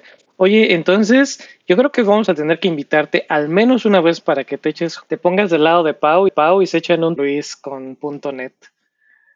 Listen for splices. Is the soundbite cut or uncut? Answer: cut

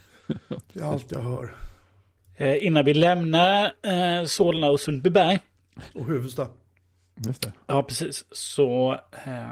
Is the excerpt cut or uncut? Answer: uncut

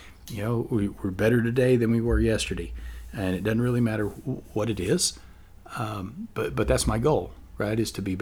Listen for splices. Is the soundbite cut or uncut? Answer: uncut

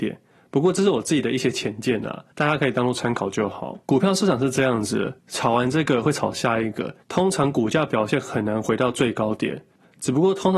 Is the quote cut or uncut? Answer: cut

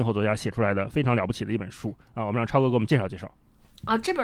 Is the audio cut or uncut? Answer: uncut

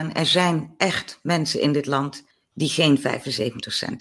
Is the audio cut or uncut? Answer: cut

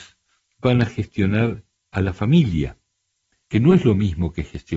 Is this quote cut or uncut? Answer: uncut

